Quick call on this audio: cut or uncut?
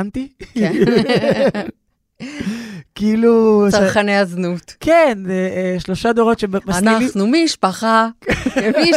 uncut